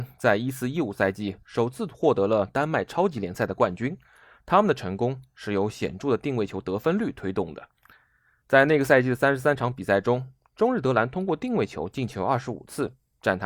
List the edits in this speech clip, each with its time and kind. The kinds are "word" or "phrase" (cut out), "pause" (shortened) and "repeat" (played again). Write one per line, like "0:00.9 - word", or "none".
none